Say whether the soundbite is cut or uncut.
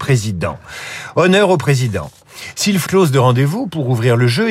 cut